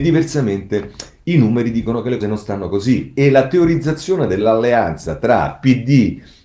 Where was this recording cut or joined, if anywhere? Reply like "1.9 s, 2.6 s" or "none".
2.2 s